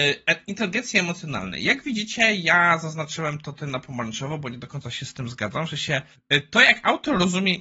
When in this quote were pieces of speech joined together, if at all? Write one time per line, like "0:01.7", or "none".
0:06.1